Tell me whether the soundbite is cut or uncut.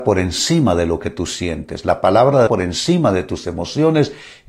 cut